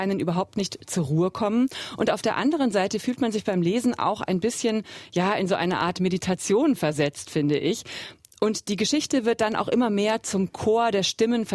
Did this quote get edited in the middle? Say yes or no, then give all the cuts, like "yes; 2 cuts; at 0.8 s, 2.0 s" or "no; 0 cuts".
no; 0 cuts